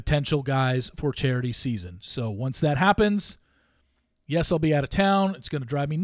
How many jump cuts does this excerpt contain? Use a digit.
0